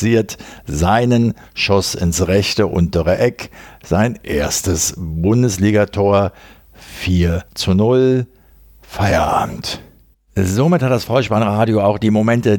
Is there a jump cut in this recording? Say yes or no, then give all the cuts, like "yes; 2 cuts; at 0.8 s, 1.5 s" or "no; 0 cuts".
yes; 2 cuts; at 7.5 s, 10.1 s